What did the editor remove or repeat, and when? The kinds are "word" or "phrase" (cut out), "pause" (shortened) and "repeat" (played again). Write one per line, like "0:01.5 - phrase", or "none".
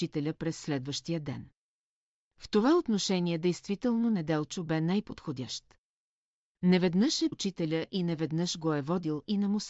0:07.3 - word